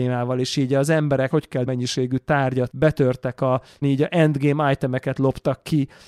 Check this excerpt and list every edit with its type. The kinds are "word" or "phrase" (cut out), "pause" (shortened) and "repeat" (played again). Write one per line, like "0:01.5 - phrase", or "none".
0:01.3 - phrase
0:01.7 - phrase
0:02.7 - word
0:03.8 - phrase